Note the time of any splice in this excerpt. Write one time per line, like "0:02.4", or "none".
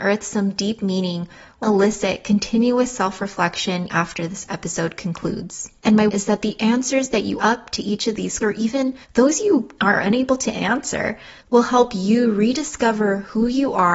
0:01.6
0:03.9
0:05.8
0:06.1
0:07.4
0:08.4
0:09.0
0:09.8
0:11.4